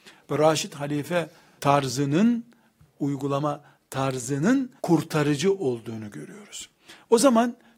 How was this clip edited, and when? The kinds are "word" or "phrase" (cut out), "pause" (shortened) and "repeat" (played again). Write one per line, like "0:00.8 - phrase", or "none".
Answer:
0:01.6 - word
0:02.8 - phrase
0:04.8 - pause